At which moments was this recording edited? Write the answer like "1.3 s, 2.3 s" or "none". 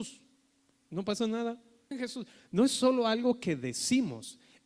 1.9 s